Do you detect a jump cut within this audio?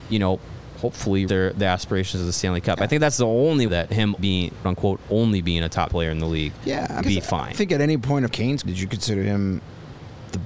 yes; 9 cuts; at 1.3 s, 3.7 s, 4.2 s, 4.6 s, 5.9 s, 7.0 s, 7.5 s, 8.3 s, 8.6 s

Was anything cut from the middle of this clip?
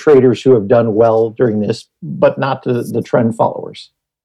yes; 1 cut; at 2.0 s

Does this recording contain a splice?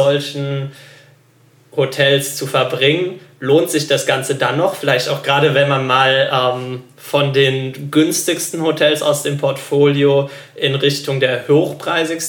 no; 0 cuts

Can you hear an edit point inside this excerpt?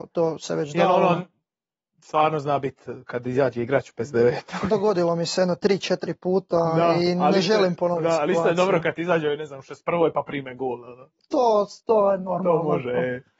no; 0 cuts

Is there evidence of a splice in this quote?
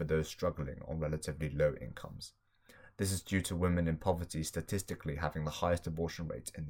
no; 0 cuts

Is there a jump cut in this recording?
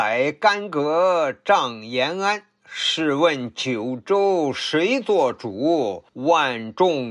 yes; 1 cut; at 6.1 s

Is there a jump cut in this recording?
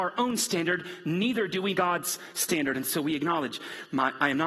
yes; 1 cut; at 1.7 s

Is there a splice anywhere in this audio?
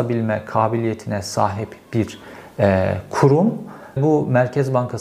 yes; 1 cut; at 4.0 s

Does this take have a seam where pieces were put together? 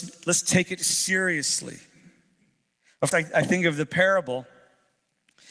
yes; 1 cut; at 3.1 s

